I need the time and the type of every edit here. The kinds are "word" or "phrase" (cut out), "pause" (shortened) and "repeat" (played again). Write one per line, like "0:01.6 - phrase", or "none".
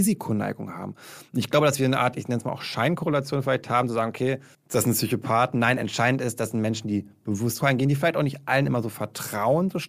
0:04.5 - pause
0:07.6 - word